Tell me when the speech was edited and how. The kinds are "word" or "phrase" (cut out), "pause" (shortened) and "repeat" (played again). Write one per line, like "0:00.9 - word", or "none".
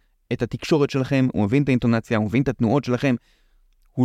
none